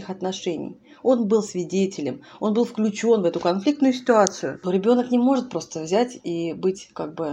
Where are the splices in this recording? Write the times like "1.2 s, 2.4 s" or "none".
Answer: none